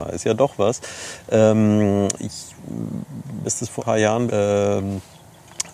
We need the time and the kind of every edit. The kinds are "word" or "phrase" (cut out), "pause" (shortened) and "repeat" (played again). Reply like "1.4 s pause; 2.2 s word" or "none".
3.4 s word; 3.8 s word; 4.3 s word